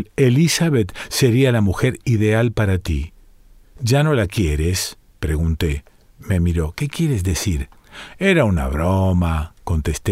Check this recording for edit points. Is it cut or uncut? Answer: uncut